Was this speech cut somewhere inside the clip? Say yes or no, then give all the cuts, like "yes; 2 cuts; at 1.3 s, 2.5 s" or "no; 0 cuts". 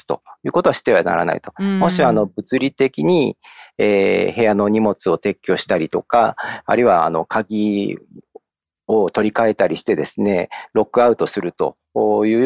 no; 0 cuts